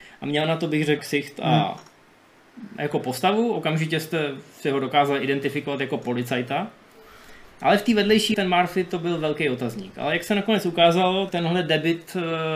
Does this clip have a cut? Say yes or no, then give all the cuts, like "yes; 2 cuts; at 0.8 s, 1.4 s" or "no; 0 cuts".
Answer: yes; 3 cuts; at 1.0 s, 8.3 s, 11.3 s